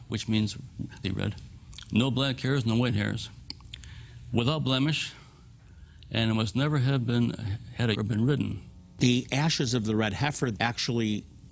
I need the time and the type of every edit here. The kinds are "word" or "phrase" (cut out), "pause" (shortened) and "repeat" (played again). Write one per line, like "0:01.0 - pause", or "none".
0:01.0 - word
0:07.9 - word
0:10.5 - word